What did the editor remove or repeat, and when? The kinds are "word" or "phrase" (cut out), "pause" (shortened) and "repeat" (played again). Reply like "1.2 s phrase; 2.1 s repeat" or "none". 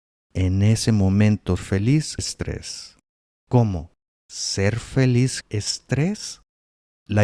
1.6 s word; 2.2 s word; 5.4 s word